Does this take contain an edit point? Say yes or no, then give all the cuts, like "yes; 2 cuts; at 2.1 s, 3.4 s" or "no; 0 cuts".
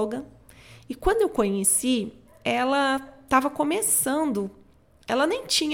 no; 0 cuts